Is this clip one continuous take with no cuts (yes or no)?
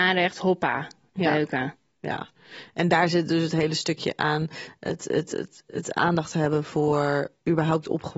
yes